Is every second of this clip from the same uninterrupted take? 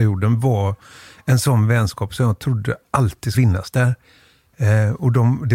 no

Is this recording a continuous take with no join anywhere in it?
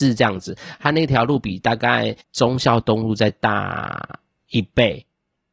no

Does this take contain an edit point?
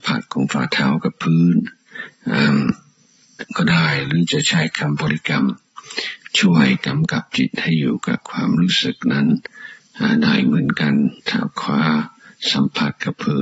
yes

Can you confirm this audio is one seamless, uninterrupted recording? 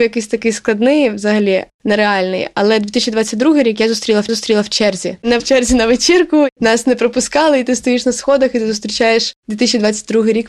no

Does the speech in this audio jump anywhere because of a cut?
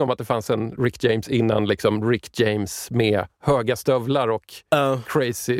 no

